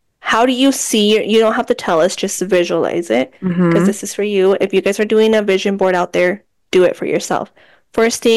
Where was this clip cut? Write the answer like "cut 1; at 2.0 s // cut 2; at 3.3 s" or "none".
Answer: none